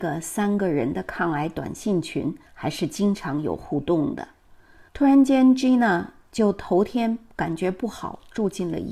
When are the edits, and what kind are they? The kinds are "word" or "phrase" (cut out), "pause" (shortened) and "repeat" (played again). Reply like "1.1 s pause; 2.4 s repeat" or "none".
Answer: 2.5 s pause; 4.9 s pause